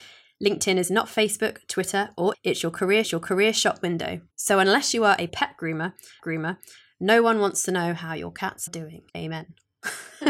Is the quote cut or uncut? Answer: cut